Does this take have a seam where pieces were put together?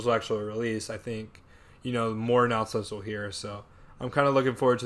no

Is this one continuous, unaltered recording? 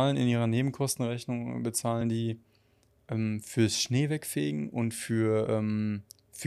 yes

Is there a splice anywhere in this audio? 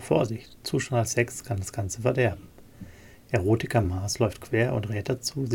no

